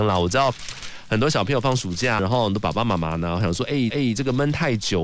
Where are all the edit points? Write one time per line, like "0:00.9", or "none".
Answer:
0:02.2
0:03.9